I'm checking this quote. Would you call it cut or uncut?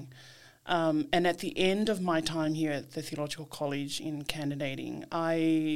uncut